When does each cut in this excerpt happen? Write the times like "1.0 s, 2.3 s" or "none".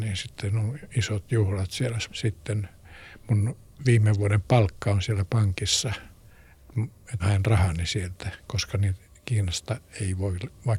2.1 s, 3.7 s, 7.2 s, 9.0 s